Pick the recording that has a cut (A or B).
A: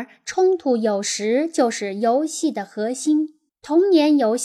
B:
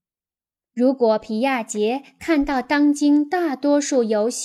A